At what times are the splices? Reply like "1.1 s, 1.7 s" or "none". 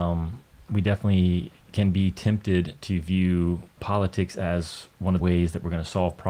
1.6 s, 3.8 s, 5.2 s